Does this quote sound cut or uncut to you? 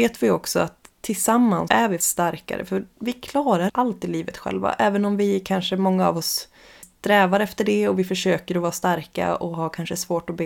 cut